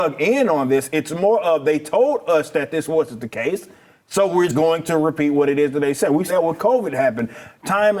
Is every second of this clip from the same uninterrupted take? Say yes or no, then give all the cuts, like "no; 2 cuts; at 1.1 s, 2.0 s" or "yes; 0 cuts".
no; 2 cuts; at 4.5 s, 6.3 s